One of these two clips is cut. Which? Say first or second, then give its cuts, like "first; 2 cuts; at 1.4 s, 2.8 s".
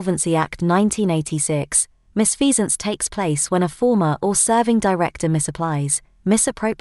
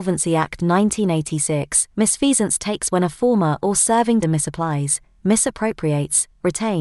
second; 3 cuts; at 1.9 s, 2.9 s, 4.2 s